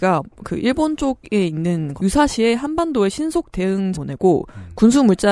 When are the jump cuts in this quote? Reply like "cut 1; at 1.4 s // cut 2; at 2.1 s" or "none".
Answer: cut 1; at 2.0 s // cut 2; at 3.9 s